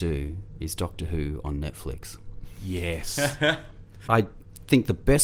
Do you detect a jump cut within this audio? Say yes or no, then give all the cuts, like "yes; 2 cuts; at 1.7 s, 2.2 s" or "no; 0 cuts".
yes; 1 cut; at 4.1 s